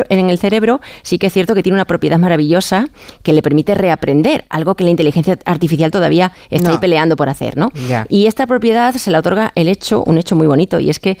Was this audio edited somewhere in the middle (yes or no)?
no